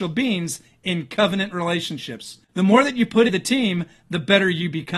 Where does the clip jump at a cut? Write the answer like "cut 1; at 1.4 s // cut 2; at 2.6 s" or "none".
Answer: cut 1; at 2.4 s // cut 2; at 3.3 s